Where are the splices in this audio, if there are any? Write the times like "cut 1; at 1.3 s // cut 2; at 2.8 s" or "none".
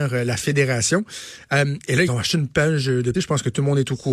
cut 1; at 2.1 s // cut 2; at 3.1 s